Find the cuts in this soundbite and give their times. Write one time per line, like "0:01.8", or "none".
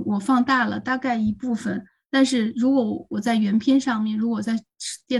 none